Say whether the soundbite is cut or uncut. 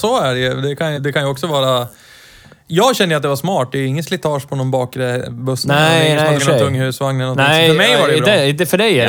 cut